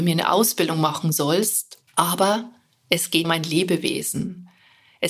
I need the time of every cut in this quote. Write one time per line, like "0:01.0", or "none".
0:01.9
0:03.2

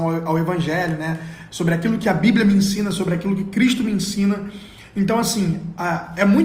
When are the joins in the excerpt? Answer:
none

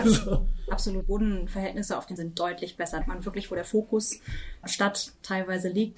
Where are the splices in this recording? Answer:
0:01.0
0:02.2
0:03.0
0:04.6

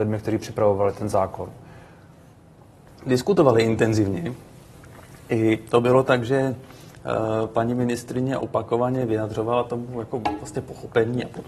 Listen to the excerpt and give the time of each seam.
none

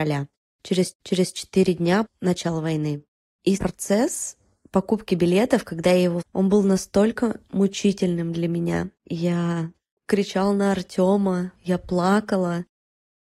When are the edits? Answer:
0:00.9
0:02.0
0:03.6
0:06.2
0:09.0
0:11.6

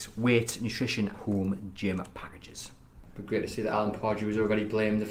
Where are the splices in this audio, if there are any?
0:01.1

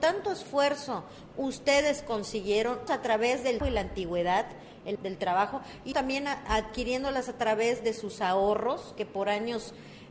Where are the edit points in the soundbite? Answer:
0:02.9
0:03.6
0:05.0
0:05.9

